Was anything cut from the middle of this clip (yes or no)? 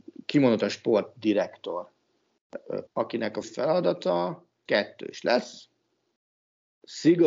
yes